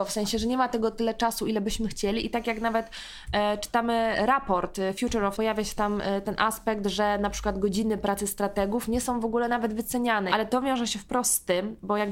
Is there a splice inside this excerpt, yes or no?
yes